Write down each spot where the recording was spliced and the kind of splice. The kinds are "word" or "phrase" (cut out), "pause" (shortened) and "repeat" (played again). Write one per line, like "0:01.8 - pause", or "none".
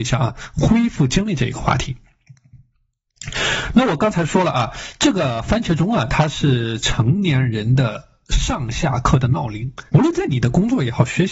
0:09.9 - pause